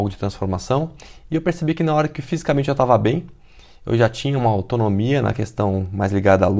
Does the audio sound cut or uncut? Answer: uncut